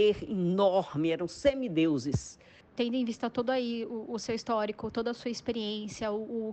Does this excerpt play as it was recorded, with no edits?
yes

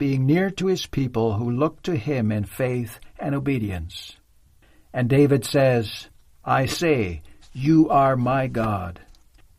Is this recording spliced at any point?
no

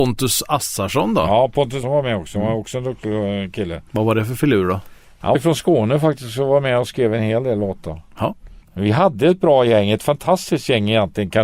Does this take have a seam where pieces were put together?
yes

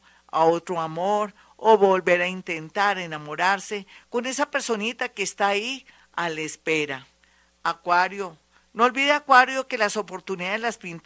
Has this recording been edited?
no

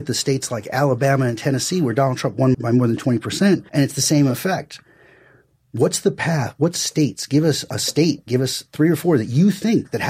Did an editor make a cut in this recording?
yes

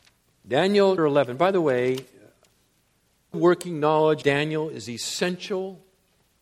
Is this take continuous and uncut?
no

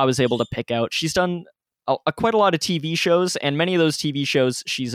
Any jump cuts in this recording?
no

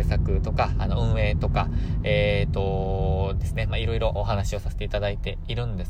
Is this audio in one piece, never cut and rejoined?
no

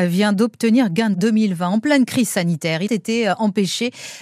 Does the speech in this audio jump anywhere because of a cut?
yes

